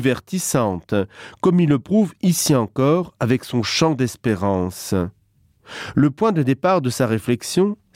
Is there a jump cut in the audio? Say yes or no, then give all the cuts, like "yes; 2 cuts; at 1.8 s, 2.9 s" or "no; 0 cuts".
no; 0 cuts